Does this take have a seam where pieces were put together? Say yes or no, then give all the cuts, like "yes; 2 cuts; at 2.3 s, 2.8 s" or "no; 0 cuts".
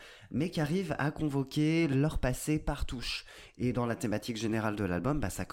no; 0 cuts